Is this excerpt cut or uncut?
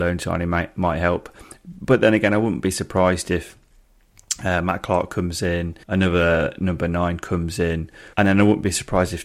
cut